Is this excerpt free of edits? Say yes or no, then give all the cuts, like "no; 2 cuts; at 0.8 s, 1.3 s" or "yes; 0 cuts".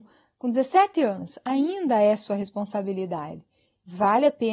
yes; 0 cuts